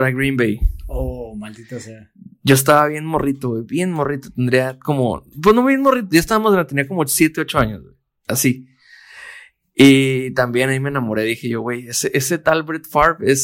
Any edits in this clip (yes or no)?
no